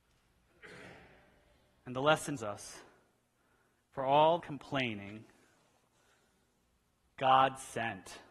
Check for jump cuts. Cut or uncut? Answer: cut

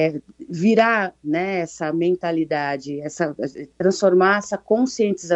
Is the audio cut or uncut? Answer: cut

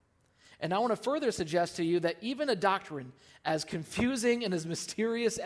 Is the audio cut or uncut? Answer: uncut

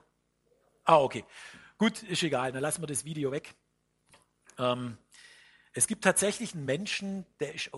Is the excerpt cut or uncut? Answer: uncut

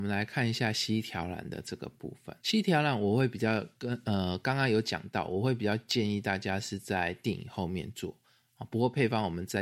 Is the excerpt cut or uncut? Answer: cut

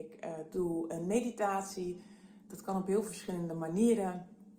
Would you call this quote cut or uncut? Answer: uncut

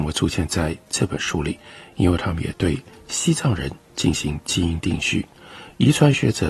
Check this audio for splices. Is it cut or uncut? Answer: uncut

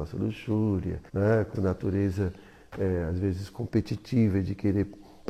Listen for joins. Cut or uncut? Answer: cut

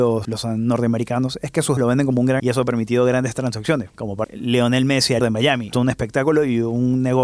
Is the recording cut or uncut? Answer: cut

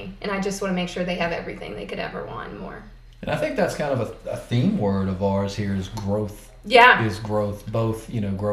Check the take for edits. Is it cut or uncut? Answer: uncut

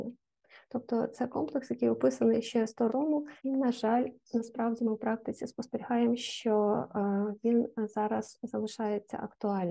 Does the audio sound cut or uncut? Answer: cut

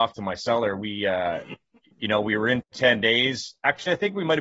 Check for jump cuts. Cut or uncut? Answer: uncut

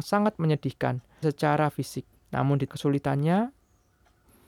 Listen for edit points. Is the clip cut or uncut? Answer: cut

